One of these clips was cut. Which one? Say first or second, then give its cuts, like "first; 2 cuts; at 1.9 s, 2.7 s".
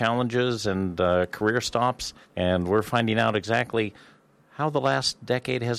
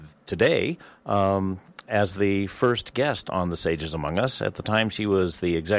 first; 1 cut; at 2.2 s